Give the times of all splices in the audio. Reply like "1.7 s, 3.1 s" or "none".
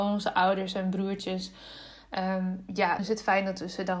3.0 s